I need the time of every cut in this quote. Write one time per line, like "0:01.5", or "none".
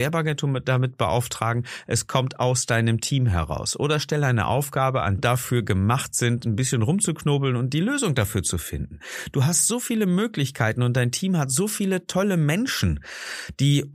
0:05.2